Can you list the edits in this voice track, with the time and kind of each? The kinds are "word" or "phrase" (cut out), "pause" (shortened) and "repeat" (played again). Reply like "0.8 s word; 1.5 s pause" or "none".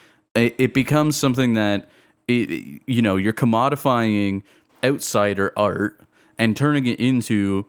none